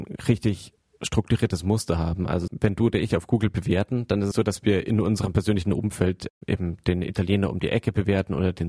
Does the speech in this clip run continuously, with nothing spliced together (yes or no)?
no